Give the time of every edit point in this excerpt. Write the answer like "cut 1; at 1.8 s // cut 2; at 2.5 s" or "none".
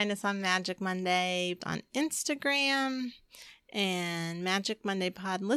cut 1; at 1.6 s